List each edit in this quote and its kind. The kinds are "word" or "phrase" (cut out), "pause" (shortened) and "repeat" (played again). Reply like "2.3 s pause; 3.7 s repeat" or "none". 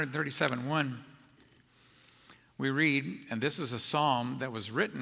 none